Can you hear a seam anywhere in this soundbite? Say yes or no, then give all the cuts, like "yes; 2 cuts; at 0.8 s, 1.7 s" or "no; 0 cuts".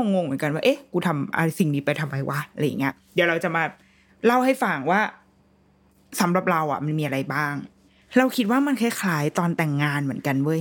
yes; 1 cut; at 7.9 s